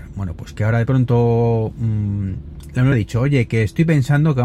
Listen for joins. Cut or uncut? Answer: cut